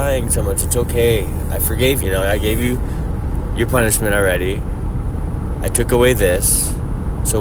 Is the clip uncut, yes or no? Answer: no